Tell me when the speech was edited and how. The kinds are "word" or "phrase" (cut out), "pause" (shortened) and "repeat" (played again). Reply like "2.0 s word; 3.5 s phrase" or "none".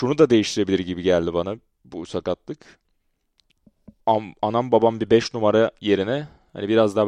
4.0 s pause